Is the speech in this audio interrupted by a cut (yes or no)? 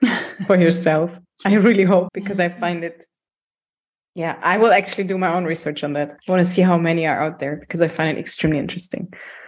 yes